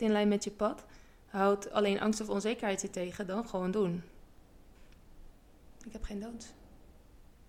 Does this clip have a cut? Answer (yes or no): no